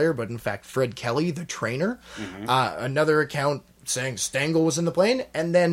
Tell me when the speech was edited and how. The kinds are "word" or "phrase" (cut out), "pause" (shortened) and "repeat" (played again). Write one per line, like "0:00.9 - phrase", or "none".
none